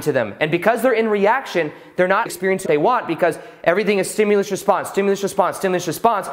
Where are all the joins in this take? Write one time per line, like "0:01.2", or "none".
0:02.3
0:02.7

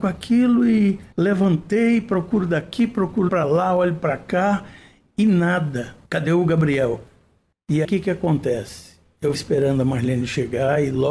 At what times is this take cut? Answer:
0:01.1
0:03.3
0:06.1
0:07.8
0:09.3

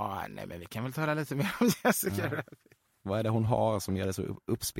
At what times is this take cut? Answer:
none

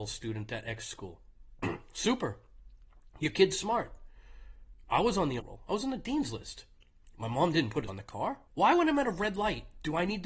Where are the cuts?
0:05.4
0:07.9
0:08.5

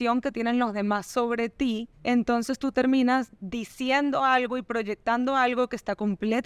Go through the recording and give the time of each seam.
0:01.9
0:03.3

